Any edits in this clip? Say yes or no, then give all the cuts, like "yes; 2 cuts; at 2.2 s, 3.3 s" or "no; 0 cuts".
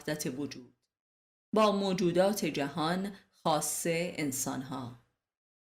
no; 0 cuts